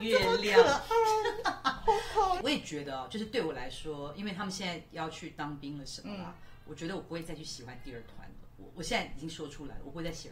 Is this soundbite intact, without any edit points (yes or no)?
yes